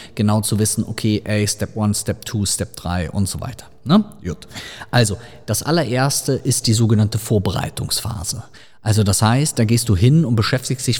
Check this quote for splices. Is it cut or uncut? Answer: uncut